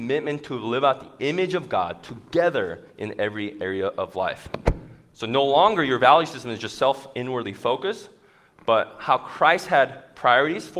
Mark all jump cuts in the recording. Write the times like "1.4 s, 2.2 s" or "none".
none